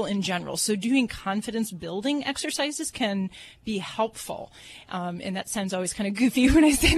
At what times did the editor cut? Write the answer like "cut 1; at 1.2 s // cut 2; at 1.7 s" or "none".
none

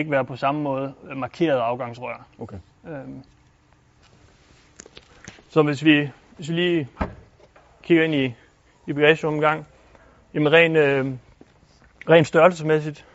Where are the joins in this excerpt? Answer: none

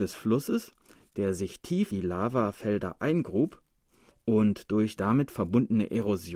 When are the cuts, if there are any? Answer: cut 1; at 1.9 s // cut 2; at 5.0 s

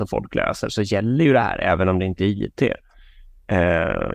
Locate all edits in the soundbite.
none

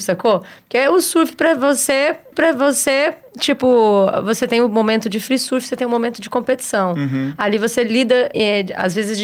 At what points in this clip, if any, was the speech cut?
cut 1; at 2.3 s // cut 2; at 8.3 s

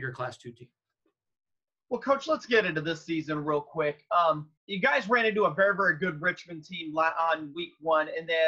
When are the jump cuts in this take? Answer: cut 1; at 4.6 s

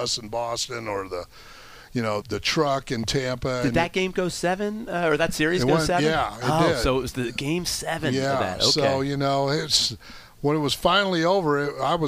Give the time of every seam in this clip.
cut 1; at 2.2 s

